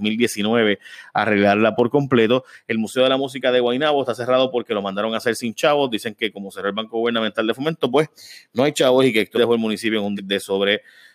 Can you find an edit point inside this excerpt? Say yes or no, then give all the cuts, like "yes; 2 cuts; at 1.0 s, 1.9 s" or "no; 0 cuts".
yes; 2 cuts; at 9.3 s, 10.2 s